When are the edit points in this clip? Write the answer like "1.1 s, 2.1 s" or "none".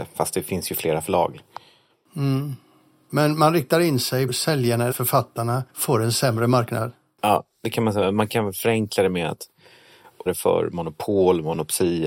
4.3 s, 4.9 s, 5.7 s, 10.3 s